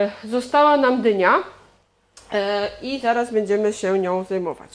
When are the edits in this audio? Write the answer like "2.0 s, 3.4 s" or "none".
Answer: none